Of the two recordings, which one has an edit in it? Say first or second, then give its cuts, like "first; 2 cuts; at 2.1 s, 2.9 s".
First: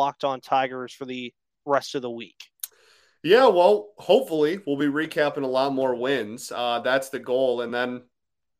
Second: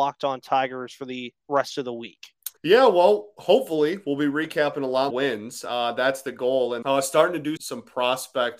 second; 5 cuts; at 1.4 s, 2.6 s, 5.1 s, 6.8 s, 7.6 s